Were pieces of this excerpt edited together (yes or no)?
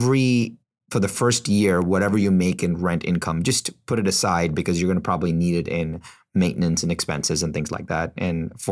no